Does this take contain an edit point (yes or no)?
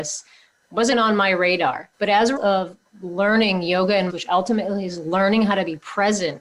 yes